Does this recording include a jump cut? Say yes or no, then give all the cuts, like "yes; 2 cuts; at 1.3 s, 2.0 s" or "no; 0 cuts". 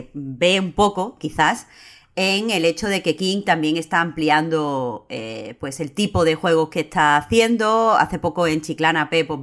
no; 0 cuts